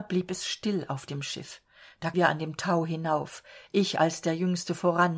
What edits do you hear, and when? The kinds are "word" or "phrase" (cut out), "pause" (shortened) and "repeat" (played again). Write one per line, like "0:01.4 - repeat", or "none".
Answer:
0:02.1 - word